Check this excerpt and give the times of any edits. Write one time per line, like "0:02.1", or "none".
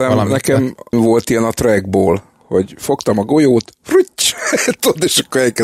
0:00.9